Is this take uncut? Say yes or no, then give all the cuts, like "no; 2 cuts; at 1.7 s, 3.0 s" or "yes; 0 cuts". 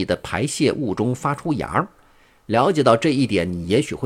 yes; 0 cuts